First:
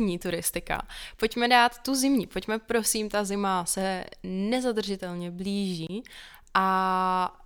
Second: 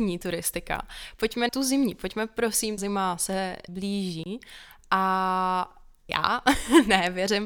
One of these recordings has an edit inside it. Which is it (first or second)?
second